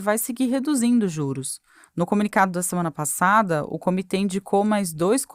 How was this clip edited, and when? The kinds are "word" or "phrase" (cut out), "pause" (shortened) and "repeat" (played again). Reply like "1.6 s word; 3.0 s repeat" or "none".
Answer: none